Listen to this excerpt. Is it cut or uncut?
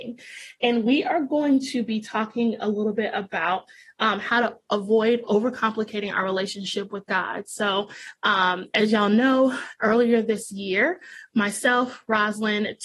uncut